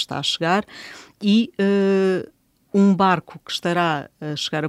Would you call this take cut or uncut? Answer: uncut